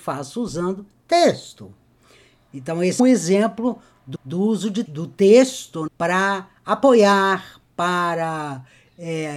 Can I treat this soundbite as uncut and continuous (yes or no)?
no